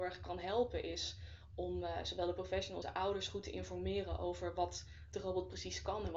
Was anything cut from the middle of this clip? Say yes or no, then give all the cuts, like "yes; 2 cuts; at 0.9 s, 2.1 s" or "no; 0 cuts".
yes; 1 cut; at 2.8 s